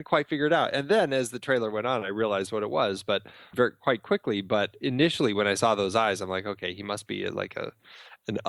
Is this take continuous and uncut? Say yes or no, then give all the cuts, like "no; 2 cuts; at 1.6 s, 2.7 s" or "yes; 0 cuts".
no; 1 cut; at 3.5 s